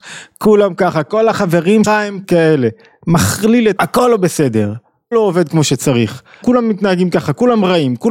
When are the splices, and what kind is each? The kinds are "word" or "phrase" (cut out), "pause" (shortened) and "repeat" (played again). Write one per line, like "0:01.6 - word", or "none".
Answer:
0:01.8 - word
0:02.2 - word
0:03.8 - word
0:05.1 - word
0:06.4 - word